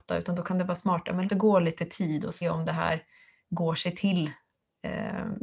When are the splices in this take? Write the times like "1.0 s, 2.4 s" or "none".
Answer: 1.3 s, 2.4 s